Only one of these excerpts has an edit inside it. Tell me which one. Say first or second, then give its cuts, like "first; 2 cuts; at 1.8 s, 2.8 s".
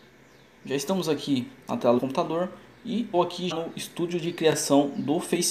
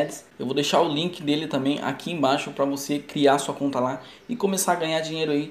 first; 4 cuts; at 1.6 s, 2.0 s, 3.1 s, 3.5 s